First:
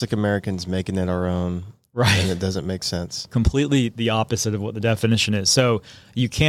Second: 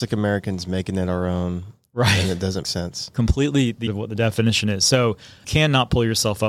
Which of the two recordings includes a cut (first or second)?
second